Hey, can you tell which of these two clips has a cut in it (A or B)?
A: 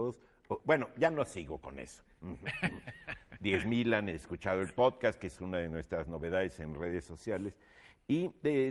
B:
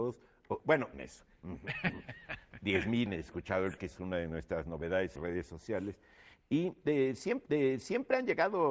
B